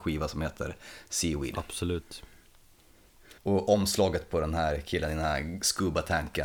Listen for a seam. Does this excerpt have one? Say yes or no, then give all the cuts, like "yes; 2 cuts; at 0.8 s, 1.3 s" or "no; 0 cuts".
yes; 1 cut; at 3.4 s